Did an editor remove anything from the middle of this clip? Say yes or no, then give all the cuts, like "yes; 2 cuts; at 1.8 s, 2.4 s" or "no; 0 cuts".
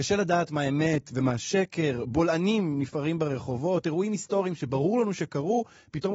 no; 0 cuts